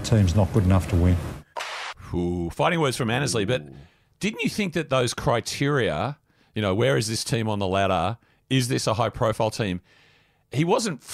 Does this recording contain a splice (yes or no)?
no